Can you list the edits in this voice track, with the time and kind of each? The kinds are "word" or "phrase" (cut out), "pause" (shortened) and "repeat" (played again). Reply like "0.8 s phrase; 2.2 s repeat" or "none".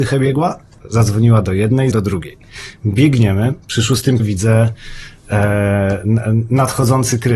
1.9 s word; 3.6 s pause; 4.2 s word